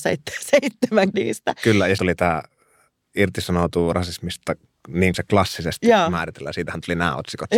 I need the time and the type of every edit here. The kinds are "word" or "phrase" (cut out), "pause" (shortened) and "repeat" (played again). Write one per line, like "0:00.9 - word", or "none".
0:01.1 - word
0:02.0 - word
0:05.1 - word

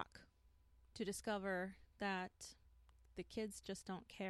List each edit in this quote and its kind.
none

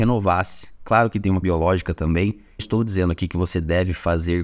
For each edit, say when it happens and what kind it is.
0:01.4 - word
0:02.6 - phrase

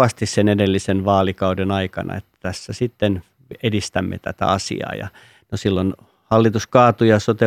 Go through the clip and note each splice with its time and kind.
none

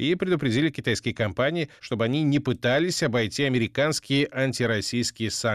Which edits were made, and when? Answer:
none

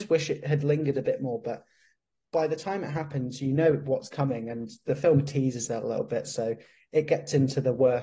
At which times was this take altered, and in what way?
none

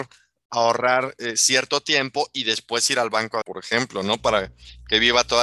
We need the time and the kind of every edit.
0:03.4 - word

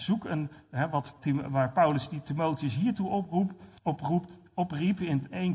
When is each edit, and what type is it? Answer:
0:01.2 - word
0:03.8 - pause

